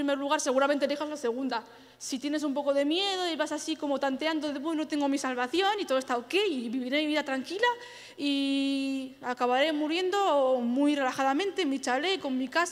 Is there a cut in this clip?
no; 0 cuts

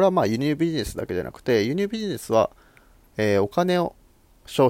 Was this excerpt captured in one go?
yes; 0 cuts

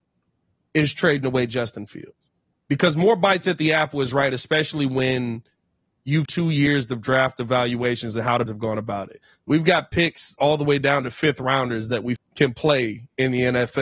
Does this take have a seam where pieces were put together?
yes; 3 cuts; at 6.3 s, 8.5 s, 12.2 s

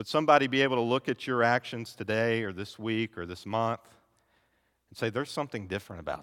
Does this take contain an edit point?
no; 0 cuts

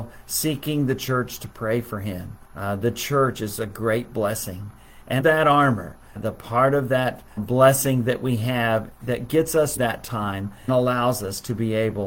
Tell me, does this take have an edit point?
yes; 6 cuts; at 2.4 s, 5.2 s, 6.2 s, 7.4 s, 9.8 s, 10.7 s

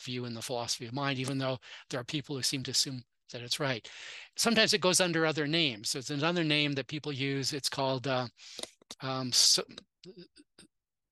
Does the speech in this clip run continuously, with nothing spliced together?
yes; 0 cuts

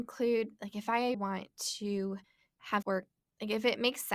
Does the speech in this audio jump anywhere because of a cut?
yes; 2 cuts; at 1.1 s, 2.8 s

